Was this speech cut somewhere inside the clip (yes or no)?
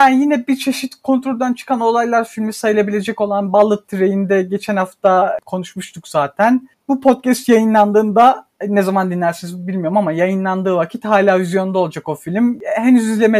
no